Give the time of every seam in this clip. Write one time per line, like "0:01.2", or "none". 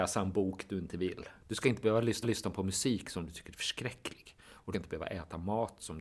0:01.4
0:02.2
0:04.7